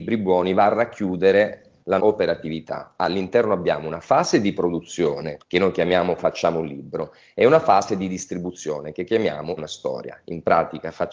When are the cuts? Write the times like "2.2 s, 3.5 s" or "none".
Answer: 2.0 s, 5.4 s, 9.6 s